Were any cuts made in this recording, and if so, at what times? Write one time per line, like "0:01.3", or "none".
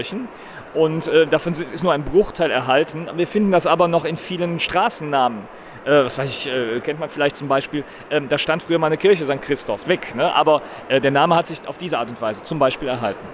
0:06.8
0:09.8